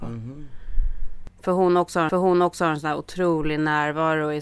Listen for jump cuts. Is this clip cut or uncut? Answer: cut